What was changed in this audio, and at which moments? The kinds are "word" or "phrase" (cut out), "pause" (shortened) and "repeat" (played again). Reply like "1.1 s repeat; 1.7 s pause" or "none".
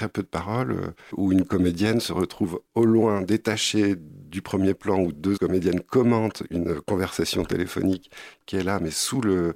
1.1 s word; 5.4 s word; 6.5 s word